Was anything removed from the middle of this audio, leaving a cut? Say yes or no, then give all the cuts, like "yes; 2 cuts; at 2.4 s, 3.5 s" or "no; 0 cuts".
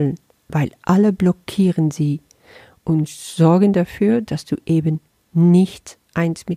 no; 0 cuts